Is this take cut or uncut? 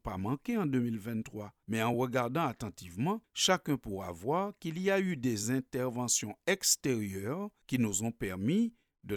uncut